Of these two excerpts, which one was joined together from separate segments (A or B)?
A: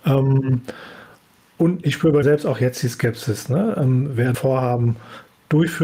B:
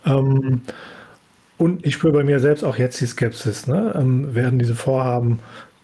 A